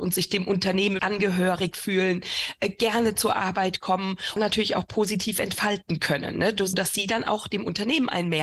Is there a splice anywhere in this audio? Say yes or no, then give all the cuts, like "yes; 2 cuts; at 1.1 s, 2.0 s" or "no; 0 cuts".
yes; 3 cuts; at 1.0 s, 4.4 s, 6.7 s